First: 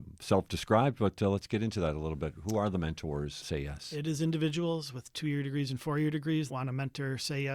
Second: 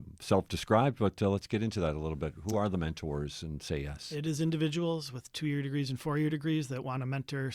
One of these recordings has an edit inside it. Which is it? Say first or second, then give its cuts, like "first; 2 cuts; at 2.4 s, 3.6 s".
first; 2 cuts; at 3.4 s, 6.5 s